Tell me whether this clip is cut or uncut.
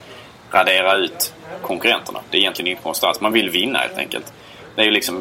uncut